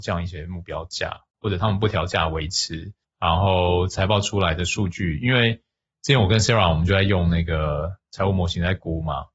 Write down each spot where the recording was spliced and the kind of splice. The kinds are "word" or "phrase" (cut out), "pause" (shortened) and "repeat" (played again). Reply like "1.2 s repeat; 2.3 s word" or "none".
1.3 s pause; 3.0 s pause